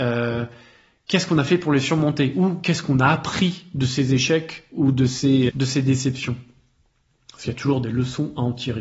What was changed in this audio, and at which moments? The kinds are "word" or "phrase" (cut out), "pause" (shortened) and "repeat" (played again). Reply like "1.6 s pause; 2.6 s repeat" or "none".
5.5 s word